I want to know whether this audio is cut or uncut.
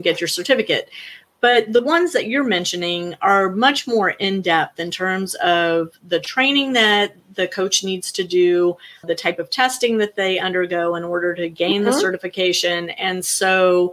cut